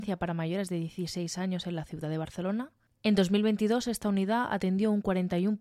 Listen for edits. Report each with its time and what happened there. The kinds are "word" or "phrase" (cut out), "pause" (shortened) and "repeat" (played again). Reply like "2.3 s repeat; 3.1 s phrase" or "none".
none